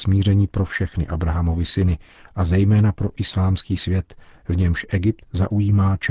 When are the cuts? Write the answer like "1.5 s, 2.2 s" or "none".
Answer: none